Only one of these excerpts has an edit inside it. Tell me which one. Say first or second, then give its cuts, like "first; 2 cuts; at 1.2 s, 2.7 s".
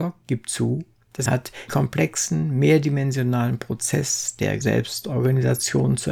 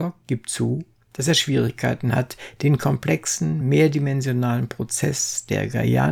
first; 3 cuts; at 1.3 s, 1.7 s, 4.6 s